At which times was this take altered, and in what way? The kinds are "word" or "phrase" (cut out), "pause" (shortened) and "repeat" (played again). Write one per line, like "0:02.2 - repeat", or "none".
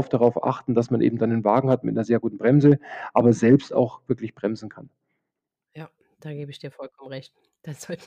none